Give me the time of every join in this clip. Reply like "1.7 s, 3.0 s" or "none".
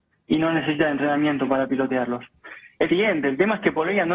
2.9 s